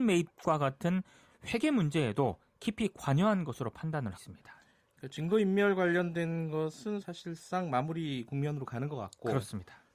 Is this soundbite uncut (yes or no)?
no